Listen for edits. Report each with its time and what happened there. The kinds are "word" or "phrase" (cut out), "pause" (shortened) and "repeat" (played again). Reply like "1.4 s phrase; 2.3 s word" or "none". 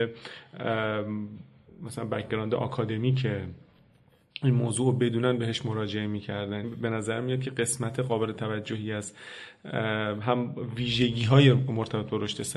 6.6 s word